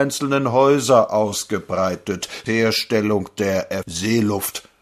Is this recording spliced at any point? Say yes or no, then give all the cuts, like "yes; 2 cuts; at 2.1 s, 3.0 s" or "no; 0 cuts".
yes; 2 cuts; at 2.5 s, 3.8 s